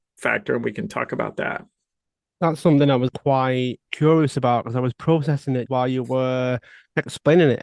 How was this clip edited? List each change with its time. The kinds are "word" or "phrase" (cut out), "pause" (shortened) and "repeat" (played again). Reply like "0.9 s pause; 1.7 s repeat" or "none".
3.1 s word; 3.9 s pause; 5.7 s word